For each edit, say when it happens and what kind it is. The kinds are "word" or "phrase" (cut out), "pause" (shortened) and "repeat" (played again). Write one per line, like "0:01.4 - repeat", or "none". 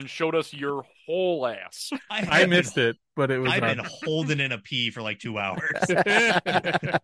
none